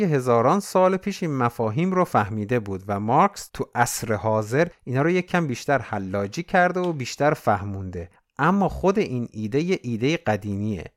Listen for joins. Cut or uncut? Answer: uncut